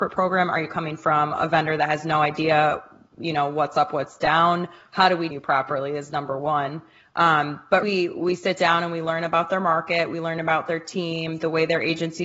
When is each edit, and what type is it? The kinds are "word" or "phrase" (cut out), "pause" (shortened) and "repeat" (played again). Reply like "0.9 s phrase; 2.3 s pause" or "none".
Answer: 5.3 s word; 7.8 s word